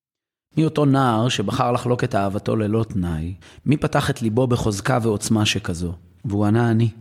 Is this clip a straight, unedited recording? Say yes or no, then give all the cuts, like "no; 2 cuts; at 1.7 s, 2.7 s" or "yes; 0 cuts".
no; 1 cut; at 3.4 s